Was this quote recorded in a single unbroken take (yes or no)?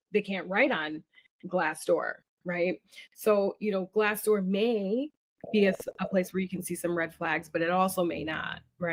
yes